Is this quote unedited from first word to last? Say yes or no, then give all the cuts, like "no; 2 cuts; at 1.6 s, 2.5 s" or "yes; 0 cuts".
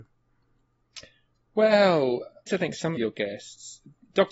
no; 2 cuts; at 2.5 s, 2.9 s